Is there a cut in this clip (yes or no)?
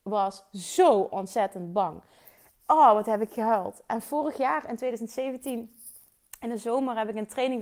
no